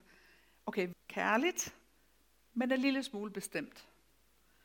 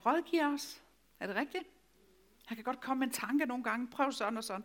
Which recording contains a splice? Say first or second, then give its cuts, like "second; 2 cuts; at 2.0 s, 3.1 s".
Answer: first; 1 cut; at 0.9 s